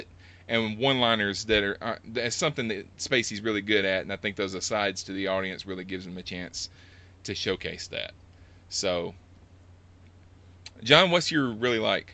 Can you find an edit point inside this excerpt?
no; 0 cuts

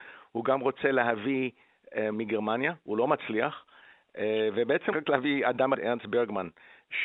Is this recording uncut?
no; 3 cuts; at 2.1 s, 4.9 s, 5.7 s

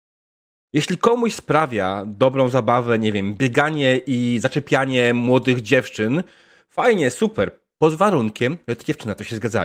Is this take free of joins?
yes; 0 cuts

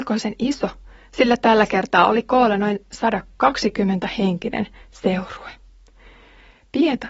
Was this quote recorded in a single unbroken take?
yes; 0 cuts

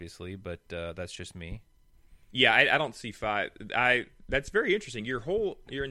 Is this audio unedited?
yes; 0 cuts

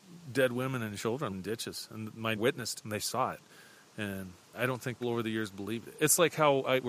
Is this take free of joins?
no; 5 cuts; at 1.3 s, 2.4 s, 2.8 s, 4.5 s, 5.0 s

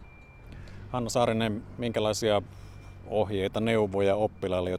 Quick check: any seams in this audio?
no; 0 cuts

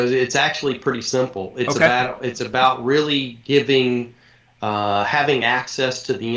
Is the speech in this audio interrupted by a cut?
no; 0 cuts

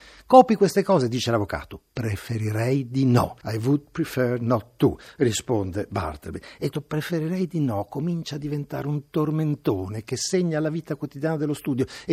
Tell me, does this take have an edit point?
yes; 2 cuts; at 3.4 s, 6.7 s

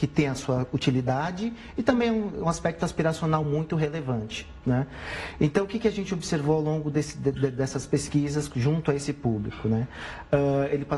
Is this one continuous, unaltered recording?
yes; 0 cuts

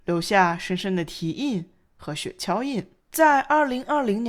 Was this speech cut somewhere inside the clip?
yes; 1 cut; at 3.0 s

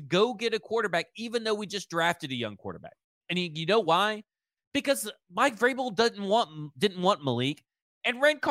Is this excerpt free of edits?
yes; 0 cuts

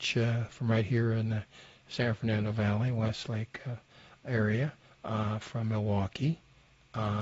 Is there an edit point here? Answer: no; 0 cuts

